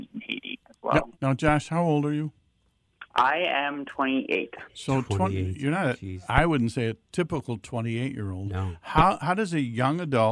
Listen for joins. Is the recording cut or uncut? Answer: cut